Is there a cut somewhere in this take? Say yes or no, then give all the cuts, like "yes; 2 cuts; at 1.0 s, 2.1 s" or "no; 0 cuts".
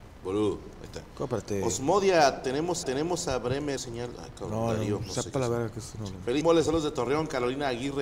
yes; 3 cuts; at 2.8 s, 3.8 s, 6.4 s